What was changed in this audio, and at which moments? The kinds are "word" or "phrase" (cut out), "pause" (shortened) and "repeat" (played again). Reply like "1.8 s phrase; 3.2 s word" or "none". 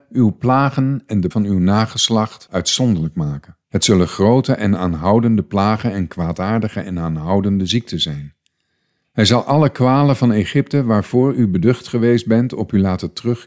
1.3 s word; 3.6 s pause; 8.7 s pause